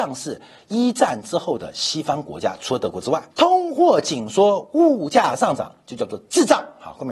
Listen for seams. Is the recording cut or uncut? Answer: cut